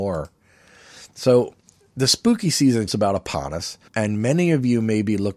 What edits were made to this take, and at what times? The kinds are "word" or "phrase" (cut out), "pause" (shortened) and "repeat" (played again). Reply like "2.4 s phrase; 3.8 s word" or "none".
2.9 s word; 3.9 s pause